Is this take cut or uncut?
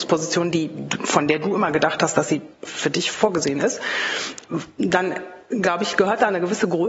cut